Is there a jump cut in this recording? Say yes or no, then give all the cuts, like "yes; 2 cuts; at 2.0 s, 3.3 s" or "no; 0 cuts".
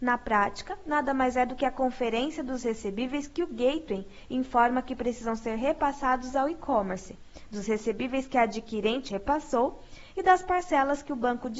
yes; 1 cut; at 9.1 s